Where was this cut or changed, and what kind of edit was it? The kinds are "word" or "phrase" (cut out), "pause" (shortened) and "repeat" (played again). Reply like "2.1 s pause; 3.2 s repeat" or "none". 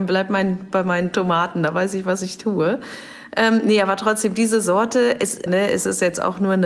5.5 s word